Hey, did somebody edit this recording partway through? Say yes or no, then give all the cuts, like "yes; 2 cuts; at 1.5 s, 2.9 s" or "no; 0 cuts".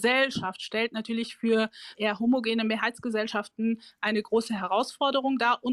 yes; 1 cut; at 1.9 s